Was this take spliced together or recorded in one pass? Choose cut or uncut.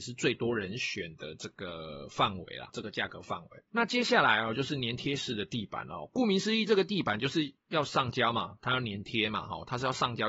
cut